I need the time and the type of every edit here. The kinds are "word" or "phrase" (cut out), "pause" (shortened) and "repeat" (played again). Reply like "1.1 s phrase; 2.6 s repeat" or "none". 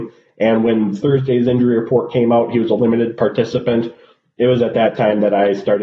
none